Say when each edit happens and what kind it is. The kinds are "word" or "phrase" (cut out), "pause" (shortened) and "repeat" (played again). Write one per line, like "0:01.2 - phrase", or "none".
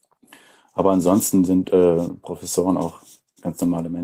none